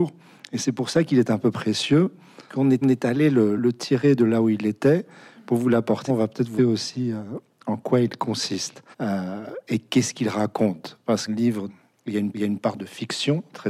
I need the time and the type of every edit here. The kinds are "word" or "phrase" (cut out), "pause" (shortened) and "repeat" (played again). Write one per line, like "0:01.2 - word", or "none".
0:02.5 - word
0:02.8 - repeat
0:03.6 - word
0:06.1 - phrase
0:06.6 - word
0:08.9 - pause
0:11.3 - phrase
0:11.7 - word
0:12.3 - repeat